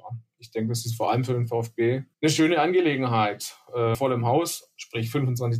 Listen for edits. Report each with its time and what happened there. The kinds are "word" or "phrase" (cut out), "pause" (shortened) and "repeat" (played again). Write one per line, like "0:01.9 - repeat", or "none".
0:02.1 - pause
0:03.9 - phrase